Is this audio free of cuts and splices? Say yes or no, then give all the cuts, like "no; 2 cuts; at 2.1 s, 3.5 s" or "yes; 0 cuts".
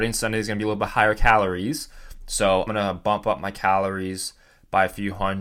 no; 1 cut; at 2.7 s